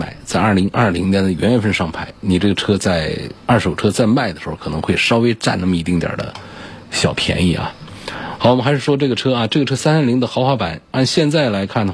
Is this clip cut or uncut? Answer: cut